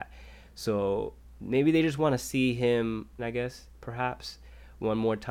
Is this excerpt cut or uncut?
cut